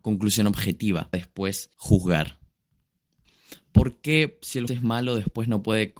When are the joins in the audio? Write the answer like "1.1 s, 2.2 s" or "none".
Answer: 1.1 s, 1.7 s, 4.7 s

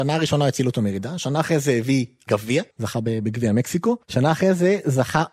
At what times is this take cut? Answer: 2.7 s, 4.0 s

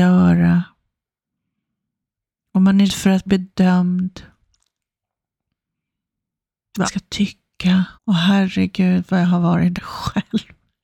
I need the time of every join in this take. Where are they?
2.9 s, 3.3 s, 6.8 s, 8.0 s, 9.8 s

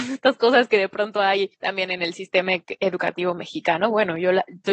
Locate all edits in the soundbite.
1.5 s

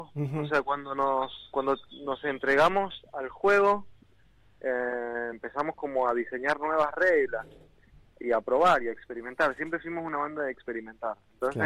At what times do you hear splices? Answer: none

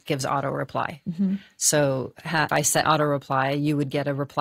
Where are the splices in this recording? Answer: 2.5 s, 2.8 s

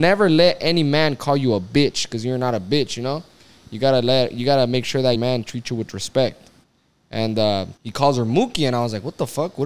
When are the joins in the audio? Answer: 5.1 s, 6.6 s, 7.8 s

